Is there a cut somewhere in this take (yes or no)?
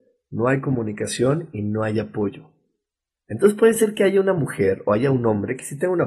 no